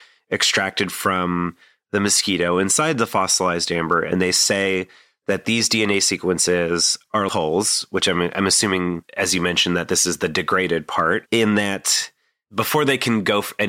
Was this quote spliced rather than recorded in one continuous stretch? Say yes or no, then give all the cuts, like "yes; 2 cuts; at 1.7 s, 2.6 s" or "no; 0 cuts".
yes; 1 cut; at 7.3 s